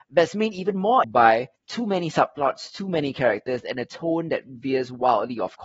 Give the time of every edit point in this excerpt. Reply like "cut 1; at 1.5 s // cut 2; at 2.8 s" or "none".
cut 1; at 1.0 s // cut 2; at 1.6 s